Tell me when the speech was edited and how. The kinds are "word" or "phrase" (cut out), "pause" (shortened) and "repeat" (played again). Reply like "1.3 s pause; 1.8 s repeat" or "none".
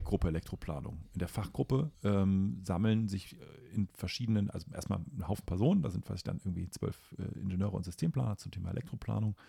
1.9 s pause